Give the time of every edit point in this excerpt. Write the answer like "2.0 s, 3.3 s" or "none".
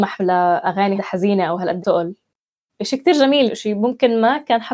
1.0 s, 1.8 s, 3.5 s